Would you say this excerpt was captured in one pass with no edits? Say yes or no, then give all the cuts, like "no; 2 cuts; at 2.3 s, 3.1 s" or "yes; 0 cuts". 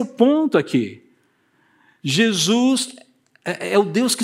yes; 0 cuts